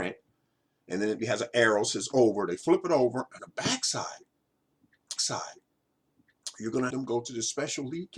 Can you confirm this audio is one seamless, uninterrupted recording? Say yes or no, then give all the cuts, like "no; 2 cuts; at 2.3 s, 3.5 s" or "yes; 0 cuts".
no; 4 cuts; at 1.2 s, 3.4 s, 5.2 s, 6.9 s